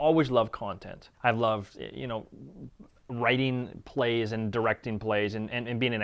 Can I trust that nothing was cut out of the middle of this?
no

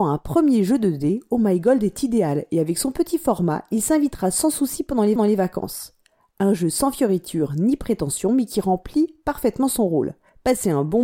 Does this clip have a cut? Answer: yes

